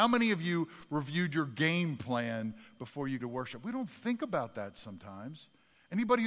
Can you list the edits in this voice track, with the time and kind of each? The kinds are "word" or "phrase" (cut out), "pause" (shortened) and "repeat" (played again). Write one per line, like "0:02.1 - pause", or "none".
0:03.2 - word